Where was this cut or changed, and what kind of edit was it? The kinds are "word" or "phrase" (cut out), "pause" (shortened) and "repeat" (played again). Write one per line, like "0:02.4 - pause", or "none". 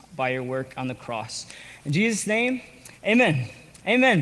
0:03.0 - pause